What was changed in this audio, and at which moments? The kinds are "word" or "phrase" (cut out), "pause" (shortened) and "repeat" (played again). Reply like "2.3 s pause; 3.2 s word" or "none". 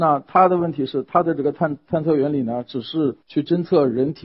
3.2 s pause